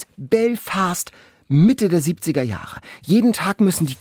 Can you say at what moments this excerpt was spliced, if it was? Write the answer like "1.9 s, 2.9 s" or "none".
none